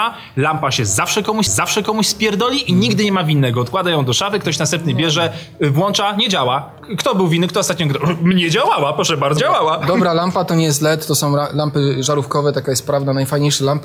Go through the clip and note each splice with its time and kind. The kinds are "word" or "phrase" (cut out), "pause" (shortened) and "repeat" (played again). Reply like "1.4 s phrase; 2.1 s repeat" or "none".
1.5 s repeat; 9.4 s phrase

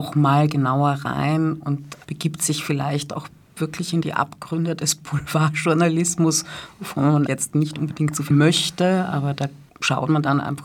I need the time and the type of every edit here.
2.0 s word; 7.3 s word; 8.3 s word

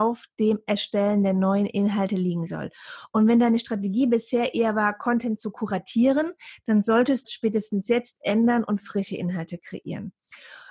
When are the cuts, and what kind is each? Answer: 7.2 s phrase

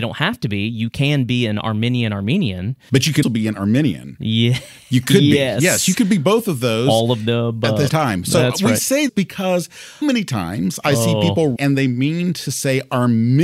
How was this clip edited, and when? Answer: 3.2 s word; 3.6 s word; 7.9 s word; 9.1 s word; 10.0 s word; 11.6 s word

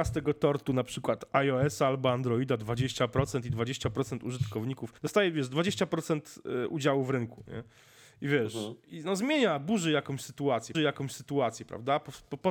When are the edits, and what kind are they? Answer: 5.0 s pause; 10.7 s repeat

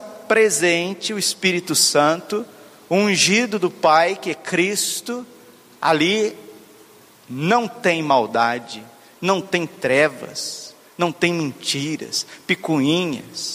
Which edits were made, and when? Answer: none

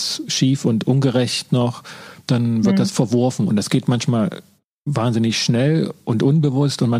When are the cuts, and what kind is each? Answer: 2.2 s pause

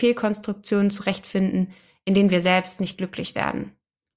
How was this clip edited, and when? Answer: none

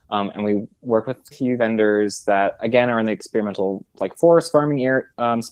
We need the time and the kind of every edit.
1.3 s phrase

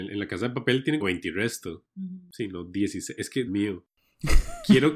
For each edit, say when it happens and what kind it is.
1.0 s word; 3.5 s word

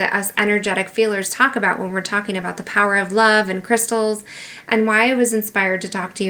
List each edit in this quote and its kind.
none

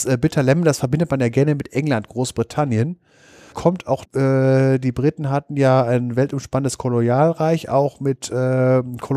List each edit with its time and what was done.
3.5 s word; 4.0 s word

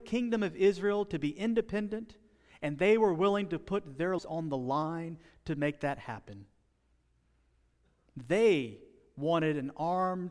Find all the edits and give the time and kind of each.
4.2 s word

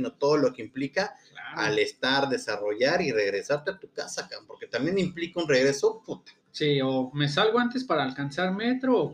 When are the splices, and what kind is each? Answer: 6.4 s pause

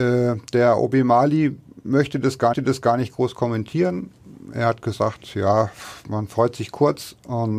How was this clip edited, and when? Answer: 2.5 s repeat

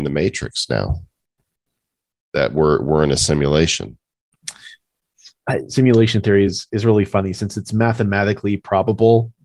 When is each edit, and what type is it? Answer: none

